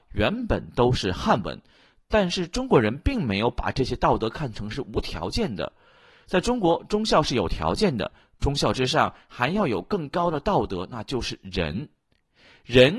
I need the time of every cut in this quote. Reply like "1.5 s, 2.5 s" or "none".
none